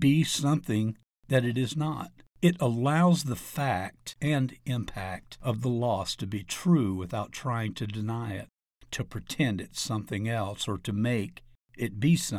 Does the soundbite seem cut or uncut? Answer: uncut